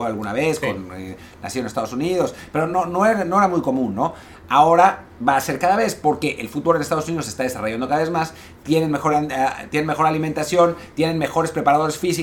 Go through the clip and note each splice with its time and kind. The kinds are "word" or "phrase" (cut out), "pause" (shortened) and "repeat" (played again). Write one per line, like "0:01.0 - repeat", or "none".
none